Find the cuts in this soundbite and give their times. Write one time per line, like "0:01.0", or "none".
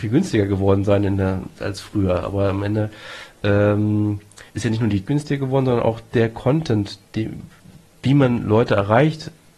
0:04.5
0:05.1